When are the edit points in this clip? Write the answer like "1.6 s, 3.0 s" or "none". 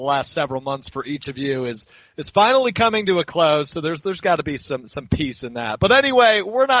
none

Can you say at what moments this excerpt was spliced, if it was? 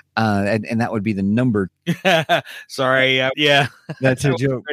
1.7 s, 3.3 s

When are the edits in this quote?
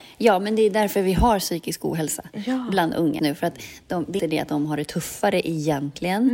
3.2 s, 4.2 s

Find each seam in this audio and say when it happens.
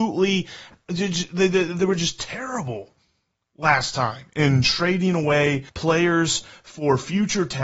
5.7 s

